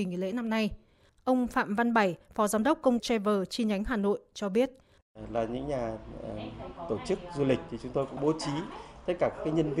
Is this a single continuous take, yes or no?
no